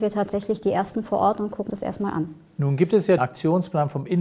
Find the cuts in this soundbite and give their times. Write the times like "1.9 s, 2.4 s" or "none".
1.7 s, 3.2 s